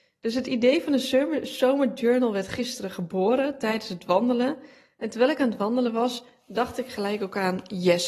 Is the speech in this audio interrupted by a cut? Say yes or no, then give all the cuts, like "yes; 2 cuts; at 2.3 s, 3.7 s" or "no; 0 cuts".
no; 0 cuts